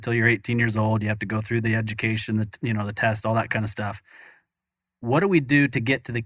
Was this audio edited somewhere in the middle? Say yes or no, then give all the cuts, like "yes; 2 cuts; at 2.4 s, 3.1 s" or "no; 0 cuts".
no; 0 cuts